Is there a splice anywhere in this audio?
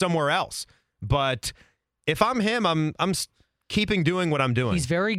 no; 0 cuts

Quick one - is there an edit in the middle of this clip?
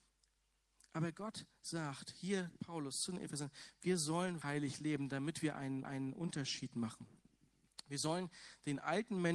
yes; 3 cuts; at 2.6 s, 4.4 s, 5.8 s

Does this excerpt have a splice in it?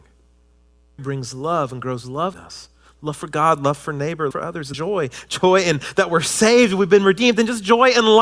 yes; 4 cuts; at 1.0 s, 2.3 s, 4.3 s, 4.7 s

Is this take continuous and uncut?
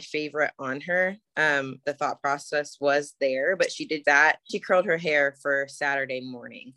no; 3 cuts; at 1.8 s, 4.0 s, 4.5 s

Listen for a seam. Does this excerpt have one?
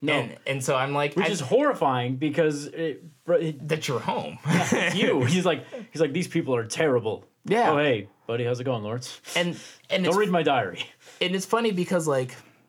no; 0 cuts

